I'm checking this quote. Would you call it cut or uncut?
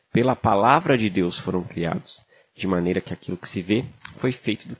uncut